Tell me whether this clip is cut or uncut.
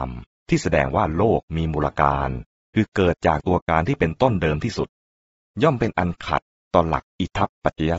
uncut